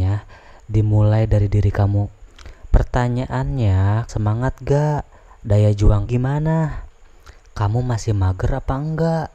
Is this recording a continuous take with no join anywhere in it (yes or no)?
no